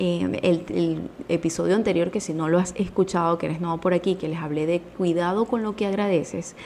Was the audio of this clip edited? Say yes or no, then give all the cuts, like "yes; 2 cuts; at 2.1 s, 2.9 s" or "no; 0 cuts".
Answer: no; 0 cuts